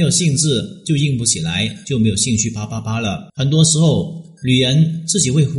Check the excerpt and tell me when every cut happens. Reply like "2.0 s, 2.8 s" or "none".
3.3 s

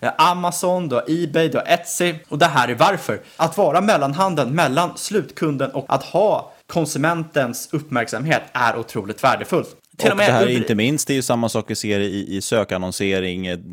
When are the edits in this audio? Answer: 2.2 s, 5.9 s, 6.6 s, 9.8 s

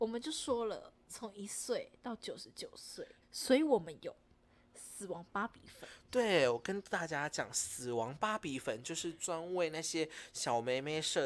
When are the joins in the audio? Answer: 3.2 s

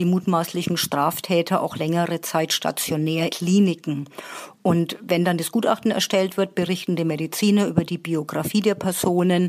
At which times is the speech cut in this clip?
3.3 s

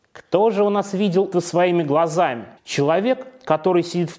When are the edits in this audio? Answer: 1.3 s, 2.6 s

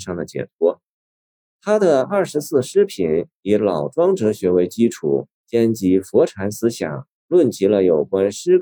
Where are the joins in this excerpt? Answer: 5.3 s, 7.2 s

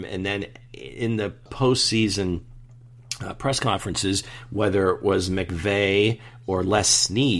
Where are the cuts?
none

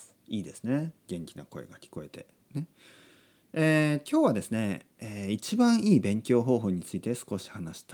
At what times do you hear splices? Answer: none

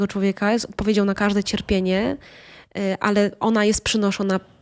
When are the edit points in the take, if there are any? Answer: none

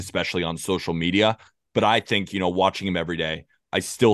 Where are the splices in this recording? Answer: none

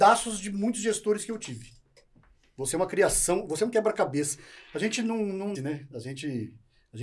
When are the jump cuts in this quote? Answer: 5.5 s

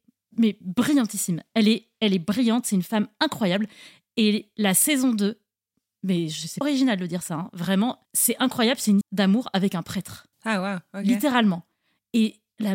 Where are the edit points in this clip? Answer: 6.6 s, 8.0 s, 9.0 s, 10.3 s

